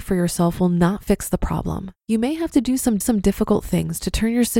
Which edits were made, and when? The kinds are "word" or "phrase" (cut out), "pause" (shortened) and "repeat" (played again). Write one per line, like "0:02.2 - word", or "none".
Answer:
0:02.0 - pause
0:03.0 - repeat

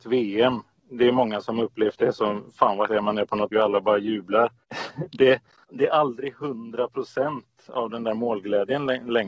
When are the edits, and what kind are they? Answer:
0:02.9 - word
0:03.5 - word

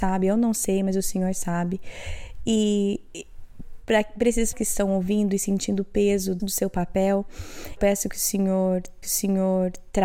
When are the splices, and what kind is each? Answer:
0:04.5 - word
0:06.4 - word
0:07.8 - word
0:09.0 - repeat

